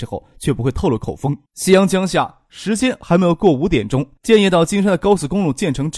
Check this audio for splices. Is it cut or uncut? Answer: cut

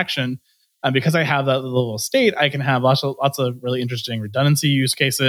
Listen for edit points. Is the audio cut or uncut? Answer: uncut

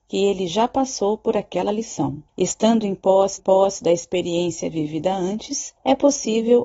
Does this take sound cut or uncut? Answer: cut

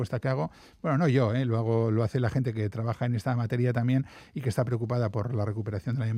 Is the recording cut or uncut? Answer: uncut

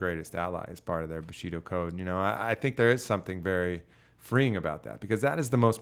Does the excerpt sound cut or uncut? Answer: uncut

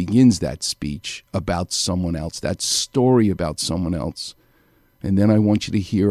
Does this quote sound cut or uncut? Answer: uncut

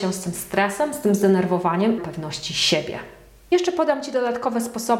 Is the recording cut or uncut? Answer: cut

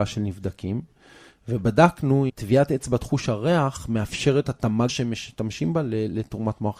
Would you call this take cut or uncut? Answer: cut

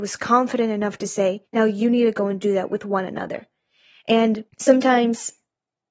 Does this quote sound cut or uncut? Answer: cut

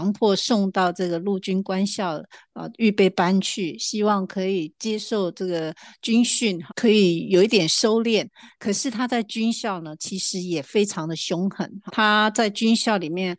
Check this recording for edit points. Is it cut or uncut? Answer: cut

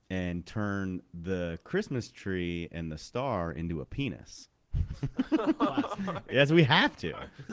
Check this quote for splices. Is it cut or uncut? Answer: uncut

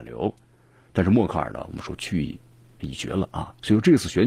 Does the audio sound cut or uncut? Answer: uncut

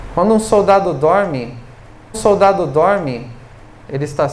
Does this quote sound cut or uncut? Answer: cut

